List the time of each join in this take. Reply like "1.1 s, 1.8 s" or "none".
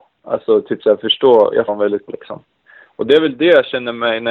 1.7 s, 2.1 s